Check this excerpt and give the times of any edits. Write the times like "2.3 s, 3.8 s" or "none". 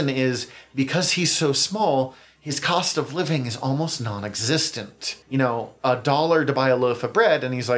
5.2 s